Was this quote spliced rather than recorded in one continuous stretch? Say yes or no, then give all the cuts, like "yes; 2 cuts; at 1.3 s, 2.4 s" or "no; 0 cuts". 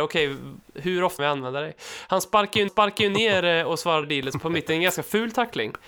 yes; 4 cuts; at 1.2 s, 2.7 s, 4.0 s, 4.4 s